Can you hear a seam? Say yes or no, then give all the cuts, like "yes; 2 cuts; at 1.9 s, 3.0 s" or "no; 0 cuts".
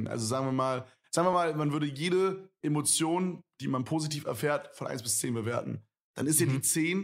no; 0 cuts